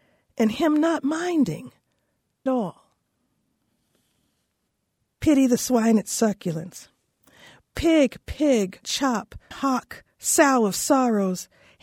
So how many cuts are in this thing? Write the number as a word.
three